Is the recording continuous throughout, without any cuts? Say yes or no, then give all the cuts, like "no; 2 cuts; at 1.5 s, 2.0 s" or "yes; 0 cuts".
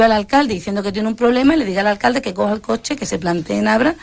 yes; 0 cuts